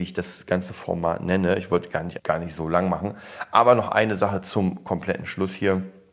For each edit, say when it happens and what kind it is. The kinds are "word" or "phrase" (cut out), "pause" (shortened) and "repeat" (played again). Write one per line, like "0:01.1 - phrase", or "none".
0:02.2 - word